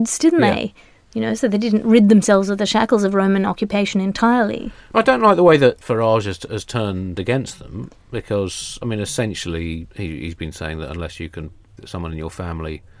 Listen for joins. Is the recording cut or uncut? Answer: cut